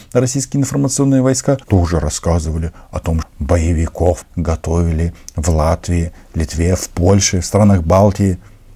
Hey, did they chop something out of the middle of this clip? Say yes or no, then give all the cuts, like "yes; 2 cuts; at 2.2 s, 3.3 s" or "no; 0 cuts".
yes; 3 cuts; at 1.6 s, 3.2 s, 4.2 s